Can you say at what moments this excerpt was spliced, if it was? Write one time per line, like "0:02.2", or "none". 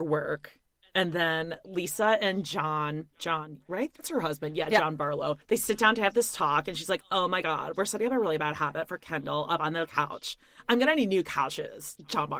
0:03.1
0:05.4